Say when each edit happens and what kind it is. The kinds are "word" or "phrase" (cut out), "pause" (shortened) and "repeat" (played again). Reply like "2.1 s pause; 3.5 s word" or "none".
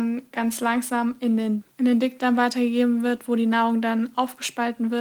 1.7 s pause